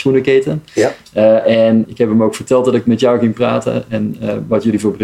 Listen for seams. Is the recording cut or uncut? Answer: cut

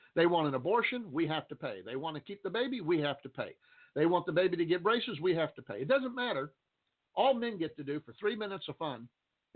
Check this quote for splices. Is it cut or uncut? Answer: uncut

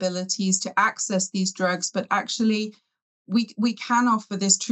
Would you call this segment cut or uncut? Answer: uncut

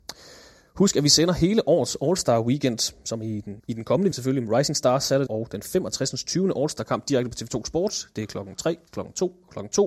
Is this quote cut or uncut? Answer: cut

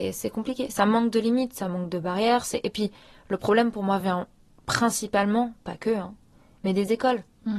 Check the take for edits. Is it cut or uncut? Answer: uncut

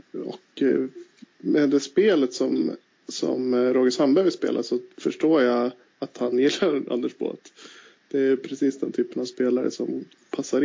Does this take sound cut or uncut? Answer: uncut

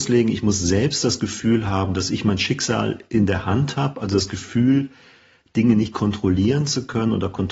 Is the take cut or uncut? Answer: uncut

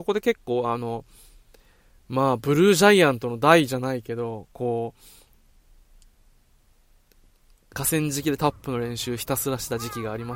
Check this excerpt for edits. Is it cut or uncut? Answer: cut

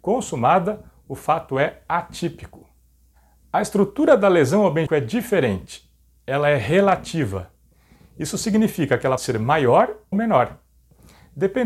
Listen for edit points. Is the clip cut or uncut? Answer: cut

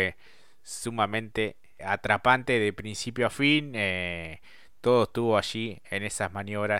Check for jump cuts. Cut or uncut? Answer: cut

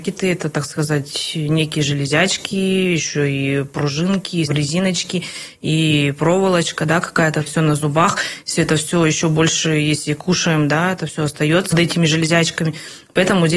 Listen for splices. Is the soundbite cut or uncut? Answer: cut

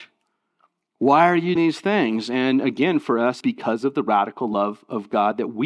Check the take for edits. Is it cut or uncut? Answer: cut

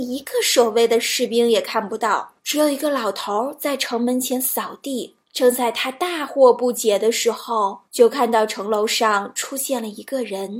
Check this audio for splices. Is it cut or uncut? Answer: cut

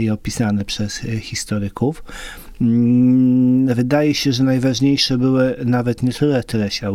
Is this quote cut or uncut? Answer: uncut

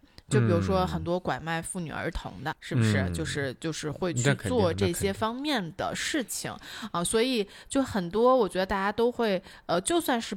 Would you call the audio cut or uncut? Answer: cut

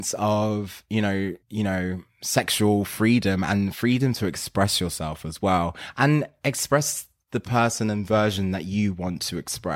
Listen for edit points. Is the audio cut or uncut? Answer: cut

